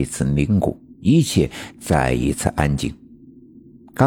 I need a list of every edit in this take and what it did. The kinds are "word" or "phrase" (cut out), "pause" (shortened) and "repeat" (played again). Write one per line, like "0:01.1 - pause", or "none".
0:00.9 - pause